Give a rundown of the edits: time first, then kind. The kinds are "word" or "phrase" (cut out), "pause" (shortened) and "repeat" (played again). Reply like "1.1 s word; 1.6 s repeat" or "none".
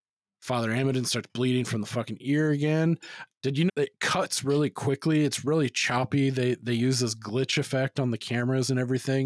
3.7 s phrase

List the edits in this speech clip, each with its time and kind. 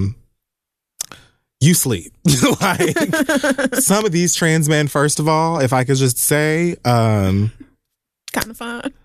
none

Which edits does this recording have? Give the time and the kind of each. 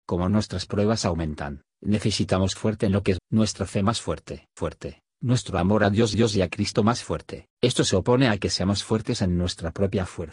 2.6 s phrase; 3.2 s word; 4.6 s phrase; 6.1 s repeat; 7.5 s pause

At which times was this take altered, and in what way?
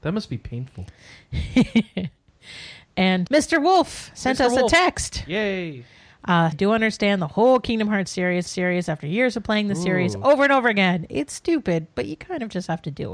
3.3 s word; 6.5 s phrase; 8.5 s repeat

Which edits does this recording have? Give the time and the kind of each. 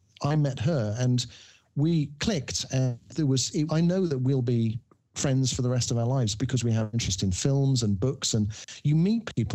3.7 s word; 6.9 s word

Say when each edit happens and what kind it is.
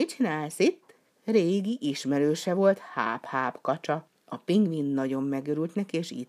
1.0 s pause; 4.1 s pause

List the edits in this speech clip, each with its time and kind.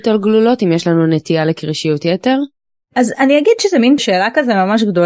4.0 s word

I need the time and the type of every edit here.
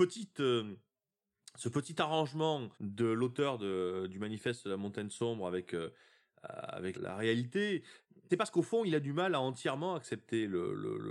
2.7 s pause; 6.9 s word; 8.3 s phrase

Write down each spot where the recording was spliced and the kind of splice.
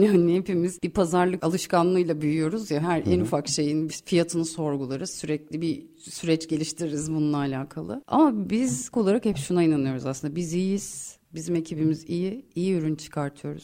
2.8 s word; 3.9 s word; 8.9 s word

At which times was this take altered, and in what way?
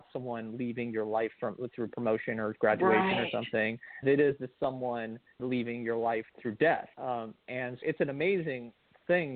4.0 s word; 5.4 s word; 6.3 s pause; 6.9 s pause; 7.8 s word

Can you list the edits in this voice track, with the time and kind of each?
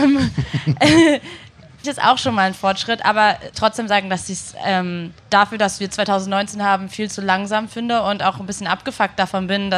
1.8 s phrase; 3.5 s phrase; 5.2 s pause

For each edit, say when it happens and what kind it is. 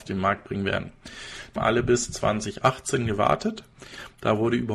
1.6 s word

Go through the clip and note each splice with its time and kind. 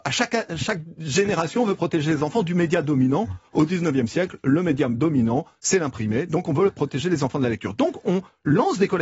none

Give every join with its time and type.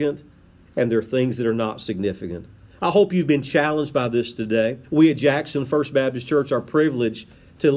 4.8 s pause

